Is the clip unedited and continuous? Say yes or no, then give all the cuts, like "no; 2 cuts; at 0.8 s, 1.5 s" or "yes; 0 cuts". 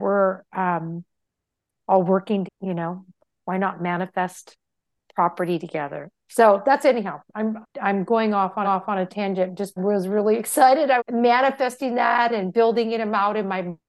no; 5 cuts; at 2.4 s, 7.6 s, 8.6 s, 9.8 s, 11.0 s